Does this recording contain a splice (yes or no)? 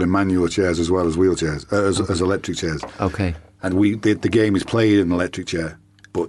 no